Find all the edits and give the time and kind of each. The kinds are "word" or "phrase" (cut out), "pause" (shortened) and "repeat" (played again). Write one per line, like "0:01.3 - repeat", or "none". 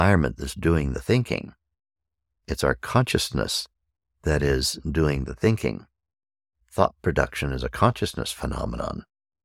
none